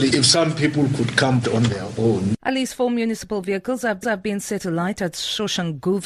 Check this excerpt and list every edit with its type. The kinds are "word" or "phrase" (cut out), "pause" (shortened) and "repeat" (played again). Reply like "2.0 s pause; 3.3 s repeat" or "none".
1.4 s word; 2.4 s pause; 4.0 s repeat